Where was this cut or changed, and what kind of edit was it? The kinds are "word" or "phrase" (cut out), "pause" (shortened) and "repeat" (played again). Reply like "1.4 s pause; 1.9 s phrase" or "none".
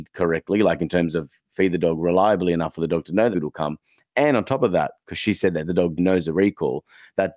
3.3 s word; 6.0 s word